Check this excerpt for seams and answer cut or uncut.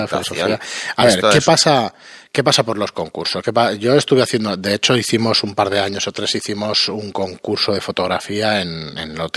uncut